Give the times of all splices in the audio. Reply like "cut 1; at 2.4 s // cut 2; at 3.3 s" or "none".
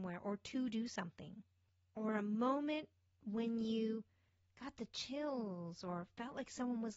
none